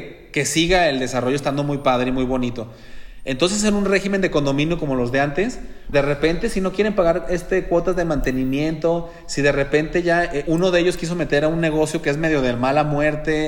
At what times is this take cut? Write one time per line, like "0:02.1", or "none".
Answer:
0:05.9
0:10.4

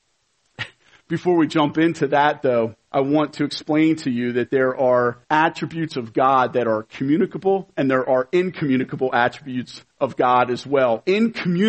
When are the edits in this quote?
0:02.8
0:05.2
0:09.9

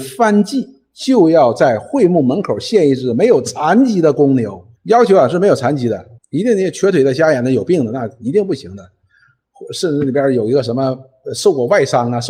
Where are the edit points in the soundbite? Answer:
0:04.8
0:06.2

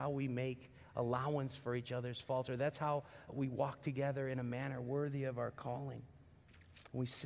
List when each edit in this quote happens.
0:03.3

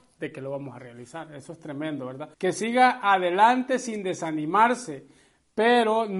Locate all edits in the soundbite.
0:02.3

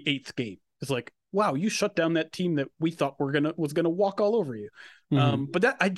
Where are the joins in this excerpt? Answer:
none

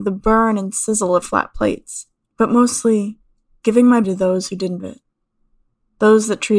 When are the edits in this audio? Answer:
0:01.2
0:04.0
0:04.8

